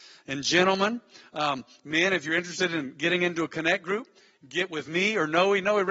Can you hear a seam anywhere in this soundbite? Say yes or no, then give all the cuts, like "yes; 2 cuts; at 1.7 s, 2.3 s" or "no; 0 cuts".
no; 0 cuts